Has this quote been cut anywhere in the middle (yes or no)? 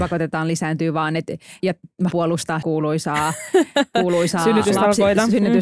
yes